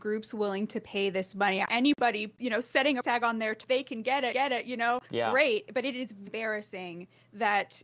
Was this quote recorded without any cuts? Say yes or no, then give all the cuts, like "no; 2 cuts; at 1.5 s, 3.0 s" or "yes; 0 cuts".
no; 6 cuts; at 1.7 s, 3.0 s, 3.6 s, 4.3 s, 5.1 s, 6.3 s